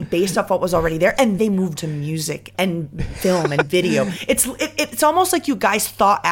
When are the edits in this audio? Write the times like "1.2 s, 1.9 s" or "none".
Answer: 1.4 s, 1.8 s, 2.5 s